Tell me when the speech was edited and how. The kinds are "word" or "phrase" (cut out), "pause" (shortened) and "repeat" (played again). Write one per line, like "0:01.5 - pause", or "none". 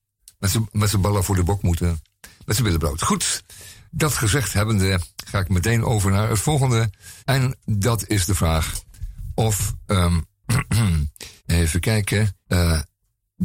0:07.2 - pause
0:11.4 - pause
0:12.4 - pause